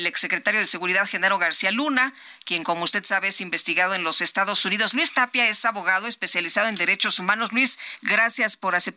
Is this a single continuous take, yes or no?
yes